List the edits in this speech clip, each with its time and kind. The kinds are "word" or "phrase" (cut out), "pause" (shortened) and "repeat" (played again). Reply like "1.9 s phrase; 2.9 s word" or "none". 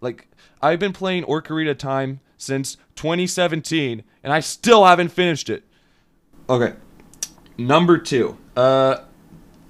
7.4 s pause; 8.5 s pause